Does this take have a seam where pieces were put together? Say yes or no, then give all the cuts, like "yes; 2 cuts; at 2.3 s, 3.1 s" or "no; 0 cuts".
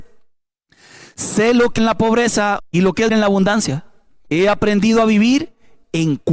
yes; 4 cuts; at 1.8 s, 2.6 s, 3.1 s, 4.3 s